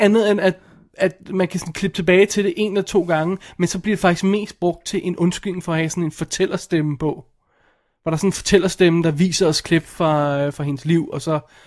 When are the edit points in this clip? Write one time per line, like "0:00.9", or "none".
none